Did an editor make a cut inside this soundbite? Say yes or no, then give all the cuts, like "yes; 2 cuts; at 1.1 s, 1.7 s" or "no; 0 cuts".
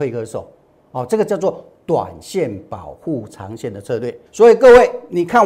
yes; 1 cut; at 4.3 s